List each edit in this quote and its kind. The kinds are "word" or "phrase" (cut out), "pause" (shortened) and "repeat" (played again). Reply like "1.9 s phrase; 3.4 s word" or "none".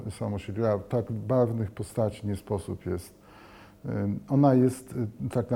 none